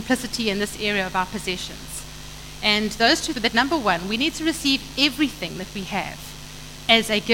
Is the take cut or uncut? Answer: cut